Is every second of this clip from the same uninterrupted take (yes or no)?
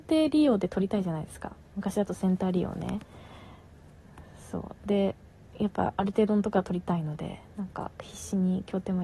yes